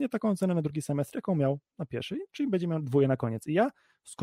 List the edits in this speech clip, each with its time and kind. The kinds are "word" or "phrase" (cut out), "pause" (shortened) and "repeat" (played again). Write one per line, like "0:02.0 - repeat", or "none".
none